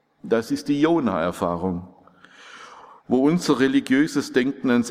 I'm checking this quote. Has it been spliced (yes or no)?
no